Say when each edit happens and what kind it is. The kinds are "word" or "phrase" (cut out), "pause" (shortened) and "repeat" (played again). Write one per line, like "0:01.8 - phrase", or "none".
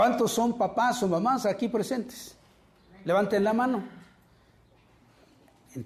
none